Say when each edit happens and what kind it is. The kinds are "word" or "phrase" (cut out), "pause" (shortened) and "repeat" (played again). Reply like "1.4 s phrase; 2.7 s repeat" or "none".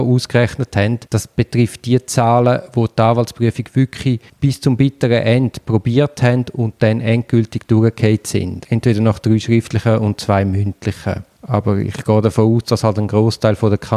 1.1 s pause; 4.3 s pause